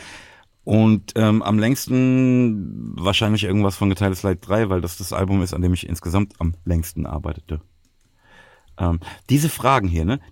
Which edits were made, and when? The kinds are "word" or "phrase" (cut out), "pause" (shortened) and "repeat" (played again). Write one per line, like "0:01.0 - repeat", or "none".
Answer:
none